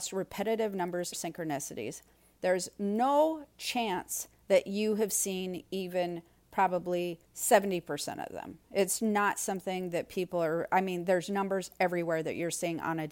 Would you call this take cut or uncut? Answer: cut